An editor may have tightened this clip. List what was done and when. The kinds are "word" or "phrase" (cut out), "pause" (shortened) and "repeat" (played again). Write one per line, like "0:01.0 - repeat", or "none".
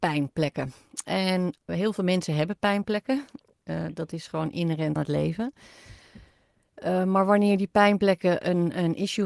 0:01.7 - word
0:05.0 - word